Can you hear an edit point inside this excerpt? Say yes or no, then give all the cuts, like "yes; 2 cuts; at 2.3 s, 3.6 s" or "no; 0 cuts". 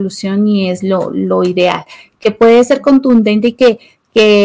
no; 0 cuts